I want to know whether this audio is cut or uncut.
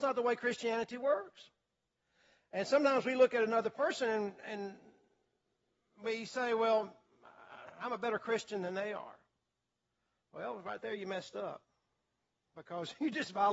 uncut